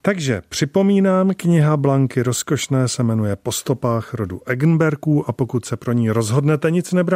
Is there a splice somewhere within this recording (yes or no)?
no